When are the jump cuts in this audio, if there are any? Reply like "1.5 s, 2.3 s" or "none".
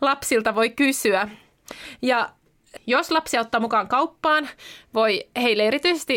2.8 s